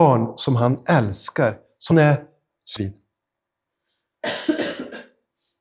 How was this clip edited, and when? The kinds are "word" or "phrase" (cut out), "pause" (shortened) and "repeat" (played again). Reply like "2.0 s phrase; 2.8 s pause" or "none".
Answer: 1.9 s word; 2.8 s word